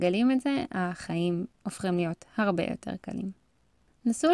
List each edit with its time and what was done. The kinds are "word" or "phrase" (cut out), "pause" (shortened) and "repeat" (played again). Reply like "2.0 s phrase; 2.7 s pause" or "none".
none